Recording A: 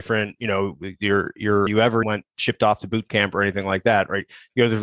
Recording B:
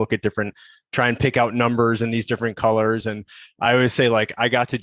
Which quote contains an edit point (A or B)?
A